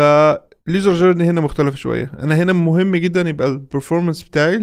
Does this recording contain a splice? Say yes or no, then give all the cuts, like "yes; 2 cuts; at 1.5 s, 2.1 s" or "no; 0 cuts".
no; 0 cuts